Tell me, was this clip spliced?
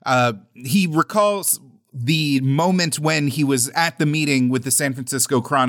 no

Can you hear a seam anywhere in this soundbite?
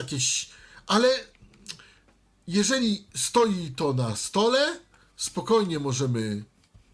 no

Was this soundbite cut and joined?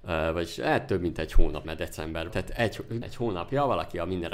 yes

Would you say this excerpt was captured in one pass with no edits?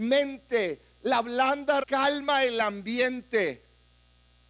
no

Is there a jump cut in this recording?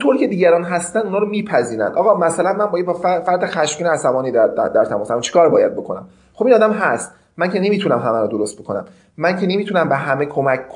no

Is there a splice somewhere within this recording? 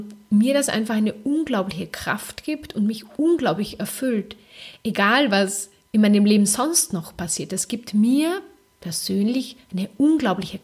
no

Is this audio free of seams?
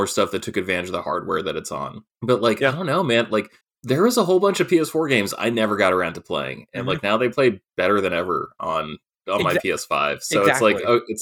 no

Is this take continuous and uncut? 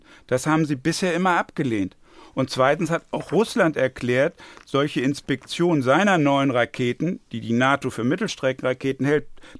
yes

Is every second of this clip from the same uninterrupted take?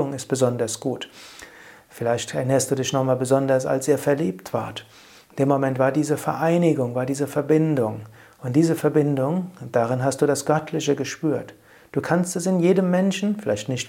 yes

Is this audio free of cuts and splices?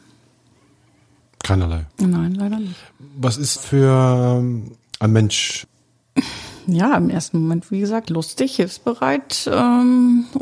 no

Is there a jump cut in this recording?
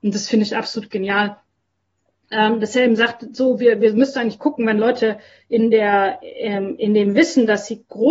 no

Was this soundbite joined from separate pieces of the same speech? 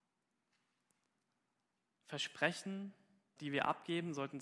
yes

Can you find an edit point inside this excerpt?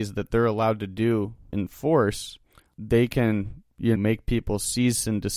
yes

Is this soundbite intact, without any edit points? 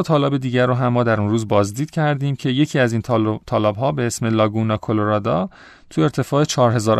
yes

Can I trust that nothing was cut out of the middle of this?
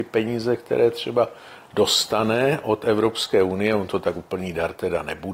yes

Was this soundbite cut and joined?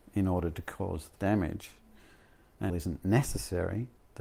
yes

